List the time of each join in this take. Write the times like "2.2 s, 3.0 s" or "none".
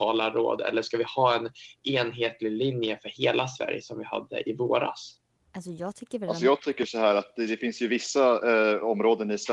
5.4 s